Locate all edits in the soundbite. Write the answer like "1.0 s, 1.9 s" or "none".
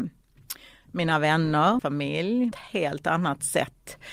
1.8 s, 2.5 s